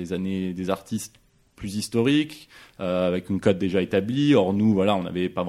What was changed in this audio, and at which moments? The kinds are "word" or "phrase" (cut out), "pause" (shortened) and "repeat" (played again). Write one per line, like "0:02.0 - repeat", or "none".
none